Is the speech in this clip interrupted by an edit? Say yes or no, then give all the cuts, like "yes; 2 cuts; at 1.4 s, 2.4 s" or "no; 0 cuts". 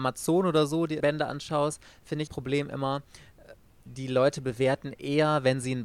yes; 3 cuts; at 1.0 s, 2.3 s, 3.9 s